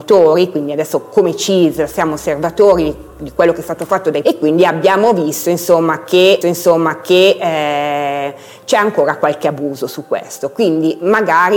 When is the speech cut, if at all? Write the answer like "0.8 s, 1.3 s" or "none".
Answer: 4.2 s, 6.4 s